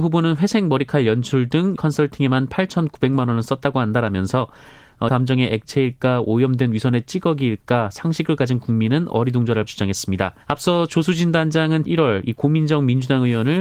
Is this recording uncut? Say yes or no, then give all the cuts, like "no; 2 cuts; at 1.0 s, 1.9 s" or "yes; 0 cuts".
no; 5 cuts; at 1.8 s, 5.1 s, 9.7 s, 10.4 s, 11.9 s